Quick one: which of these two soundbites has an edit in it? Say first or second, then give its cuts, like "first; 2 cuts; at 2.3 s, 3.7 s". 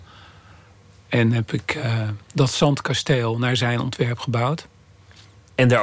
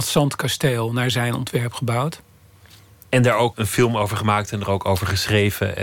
second; 1 cut; at 3.5 s